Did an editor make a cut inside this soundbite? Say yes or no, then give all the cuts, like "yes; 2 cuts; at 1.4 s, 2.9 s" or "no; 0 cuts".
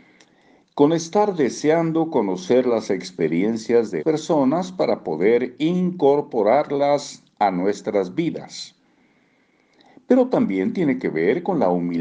yes; 1 cut; at 4.0 s